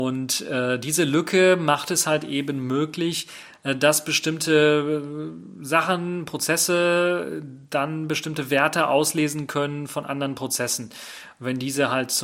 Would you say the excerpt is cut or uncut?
uncut